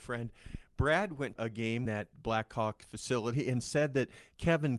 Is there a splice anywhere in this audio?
yes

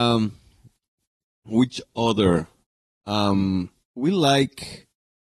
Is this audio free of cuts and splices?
yes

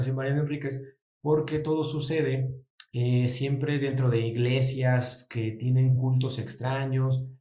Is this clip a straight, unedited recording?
yes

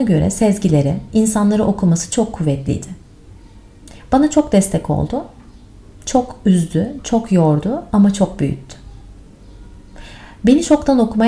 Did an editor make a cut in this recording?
no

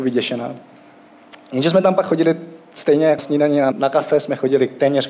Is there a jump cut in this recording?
yes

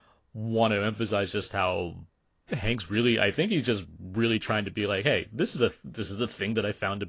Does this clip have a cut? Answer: no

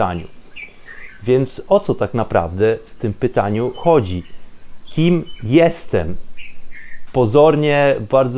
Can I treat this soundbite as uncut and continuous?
yes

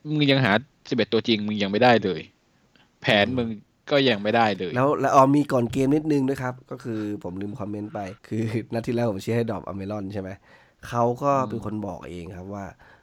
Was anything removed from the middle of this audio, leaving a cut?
yes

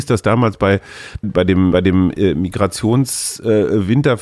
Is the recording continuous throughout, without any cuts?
no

